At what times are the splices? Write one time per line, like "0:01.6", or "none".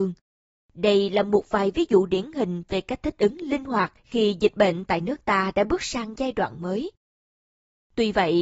0:04.0